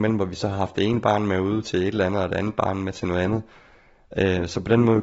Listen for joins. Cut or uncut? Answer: uncut